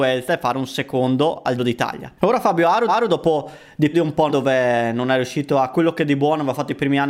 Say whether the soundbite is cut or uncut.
cut